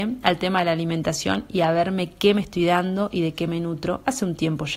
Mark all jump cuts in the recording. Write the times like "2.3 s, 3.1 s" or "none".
none